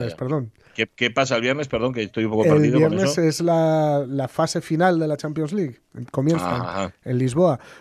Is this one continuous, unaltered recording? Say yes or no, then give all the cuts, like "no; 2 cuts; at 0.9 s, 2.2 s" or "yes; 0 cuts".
yes; 0 cuts